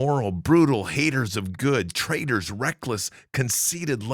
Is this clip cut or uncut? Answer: uncut